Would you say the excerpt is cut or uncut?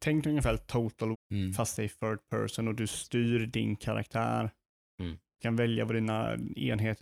cut